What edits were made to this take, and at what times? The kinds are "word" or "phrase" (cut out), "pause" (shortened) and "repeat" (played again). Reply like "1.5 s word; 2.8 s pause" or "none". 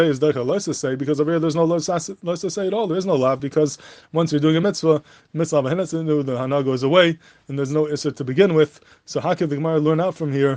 none